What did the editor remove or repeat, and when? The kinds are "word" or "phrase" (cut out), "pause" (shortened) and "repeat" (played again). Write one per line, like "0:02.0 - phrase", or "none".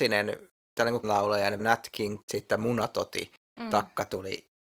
0:01.0 - word
0:01.6 - word
0:02.2 - word